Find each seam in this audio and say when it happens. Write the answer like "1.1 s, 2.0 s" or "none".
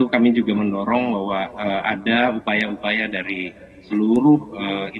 none

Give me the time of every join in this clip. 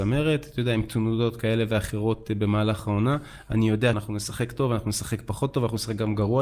3.9 s

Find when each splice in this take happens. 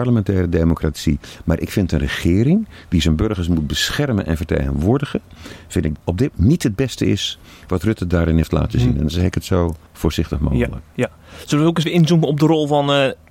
6.0 s, 6.3 s, 9.9 s, 11.8 s

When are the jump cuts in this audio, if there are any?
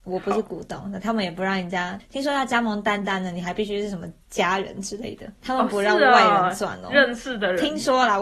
4.2 s, 5.3 s

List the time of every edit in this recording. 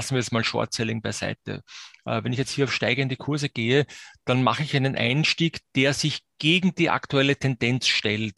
none

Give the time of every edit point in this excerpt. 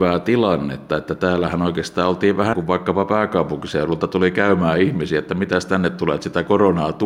2.5 s

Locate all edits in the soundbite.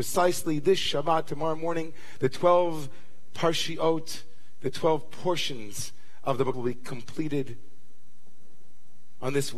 6.5 s

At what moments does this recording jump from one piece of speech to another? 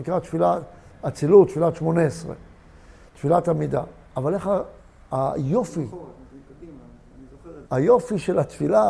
7.7 s

